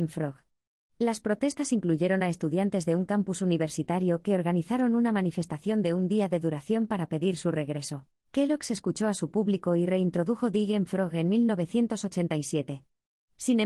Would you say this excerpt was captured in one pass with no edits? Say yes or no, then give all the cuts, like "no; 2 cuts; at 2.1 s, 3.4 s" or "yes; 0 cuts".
no; 1 cut; at 8.1 s